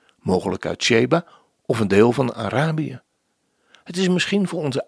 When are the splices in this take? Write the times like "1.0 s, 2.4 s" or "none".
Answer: none